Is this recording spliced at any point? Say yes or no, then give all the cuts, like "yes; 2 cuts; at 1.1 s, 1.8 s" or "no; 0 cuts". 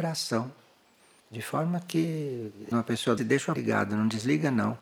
yes; 3 cuts; at 2.7 s, 3.2 s, 3.6 s